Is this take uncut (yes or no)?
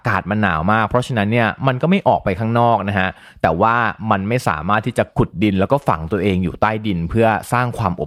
yes